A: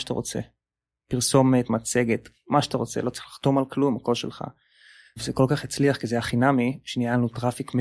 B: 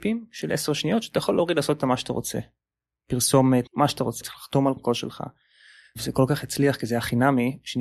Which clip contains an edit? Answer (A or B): B